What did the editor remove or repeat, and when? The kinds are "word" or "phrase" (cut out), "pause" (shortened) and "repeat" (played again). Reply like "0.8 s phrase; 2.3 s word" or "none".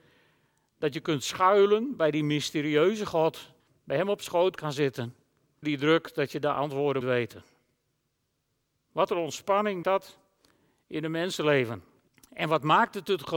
3.6 s pause; 4.6 s word; 5.6 s word; 7.0 s word; 9.8 s word; 12.1 s pause

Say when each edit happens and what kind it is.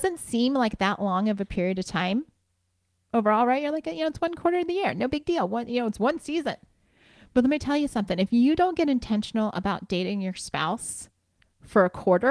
none

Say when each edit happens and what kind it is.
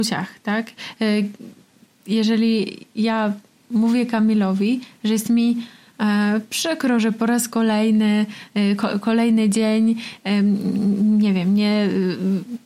none

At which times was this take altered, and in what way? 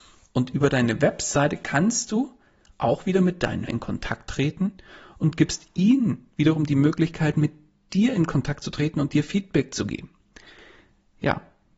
3.7 s word

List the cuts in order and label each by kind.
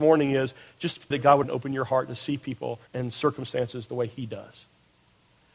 1.1 s word; 1.4 s phrase; 2.9 s pause

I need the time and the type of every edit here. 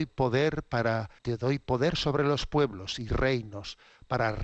1.2 s pause

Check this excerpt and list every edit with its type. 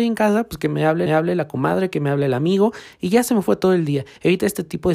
1.1 s repeat

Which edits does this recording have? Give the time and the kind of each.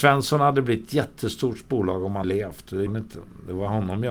2.2 s word; 2.9 s word

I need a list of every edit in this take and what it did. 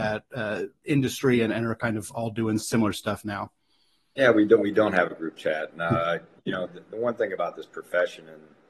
none

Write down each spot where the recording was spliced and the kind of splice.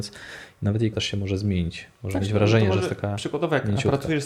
0.9 s word; 2.2 s word

